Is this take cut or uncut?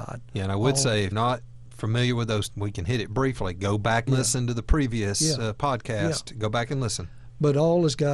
cut